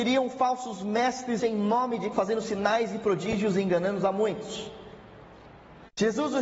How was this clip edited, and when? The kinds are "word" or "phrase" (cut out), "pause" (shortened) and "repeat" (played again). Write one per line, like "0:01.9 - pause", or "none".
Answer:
0:01.4 - word
0:02.1 - word